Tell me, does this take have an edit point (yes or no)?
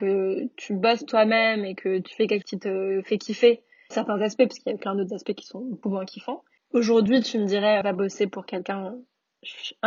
yes